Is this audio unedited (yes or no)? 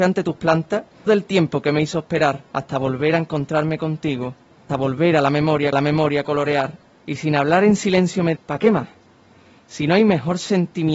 no